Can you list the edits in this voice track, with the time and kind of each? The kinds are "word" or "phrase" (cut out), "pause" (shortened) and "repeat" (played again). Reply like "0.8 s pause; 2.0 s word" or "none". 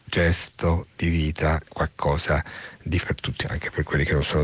1.7 s word; 3.0 s word; 3.4 s word